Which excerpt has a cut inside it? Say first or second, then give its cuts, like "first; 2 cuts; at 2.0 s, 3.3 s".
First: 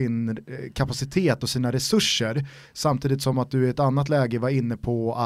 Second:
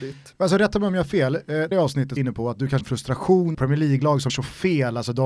second; 5 cuts; at 1.7 s, 2.2 s, 2.8 s, 3.5 s, 4.3 s